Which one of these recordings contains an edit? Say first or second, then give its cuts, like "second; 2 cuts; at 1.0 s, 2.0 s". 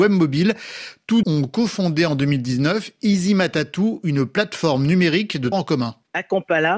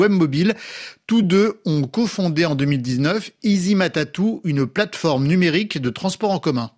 first; 2 cuts; at 1.2 s, 5.5 s